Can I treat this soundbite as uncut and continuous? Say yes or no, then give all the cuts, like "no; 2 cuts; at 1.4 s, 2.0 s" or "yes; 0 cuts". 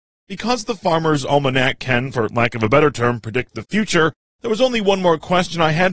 yes; 0 cuts